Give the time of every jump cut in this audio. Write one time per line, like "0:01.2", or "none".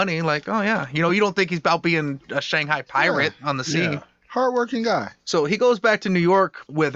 none